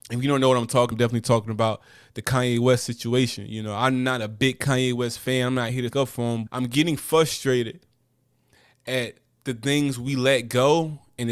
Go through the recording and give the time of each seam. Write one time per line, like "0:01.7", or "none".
0:00.9
0:05.9
0:06.5